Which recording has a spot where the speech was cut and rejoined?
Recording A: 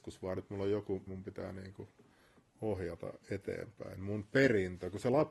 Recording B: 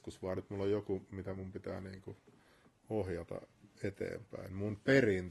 A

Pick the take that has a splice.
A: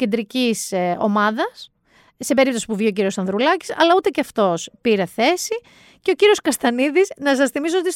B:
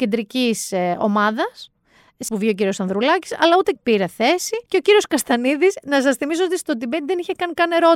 B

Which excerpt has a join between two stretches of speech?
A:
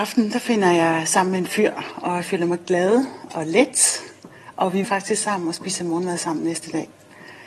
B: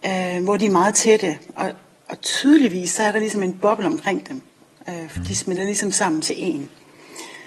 A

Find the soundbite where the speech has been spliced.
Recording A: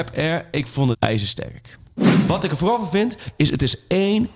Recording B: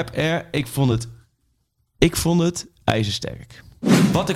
A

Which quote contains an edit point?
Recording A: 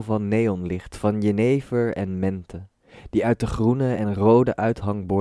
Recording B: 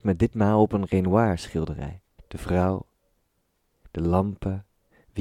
B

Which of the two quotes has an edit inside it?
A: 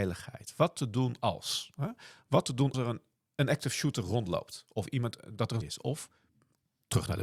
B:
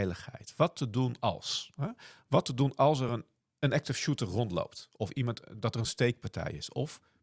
A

